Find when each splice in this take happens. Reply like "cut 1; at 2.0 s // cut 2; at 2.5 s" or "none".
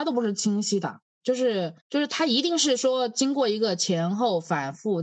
cut 1; at 1.8 s